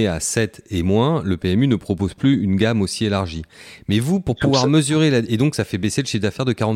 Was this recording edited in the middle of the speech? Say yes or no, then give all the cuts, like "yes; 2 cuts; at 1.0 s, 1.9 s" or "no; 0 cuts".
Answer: no; 0 cuts